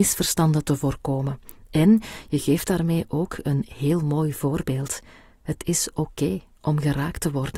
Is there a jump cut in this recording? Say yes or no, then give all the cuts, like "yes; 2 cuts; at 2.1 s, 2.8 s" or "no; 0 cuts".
no; 0 cuts